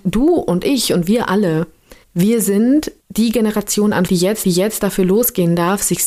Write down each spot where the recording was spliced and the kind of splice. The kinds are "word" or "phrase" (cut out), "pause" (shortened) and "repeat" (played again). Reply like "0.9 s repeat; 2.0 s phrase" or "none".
2.0 s pause; 3.0 s pause; 4.1 s word; 4.4 s repeat